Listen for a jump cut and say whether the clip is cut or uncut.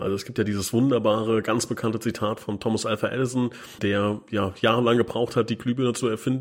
cut